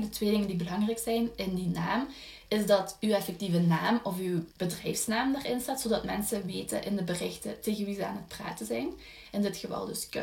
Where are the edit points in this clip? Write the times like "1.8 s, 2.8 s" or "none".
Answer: 4.5 s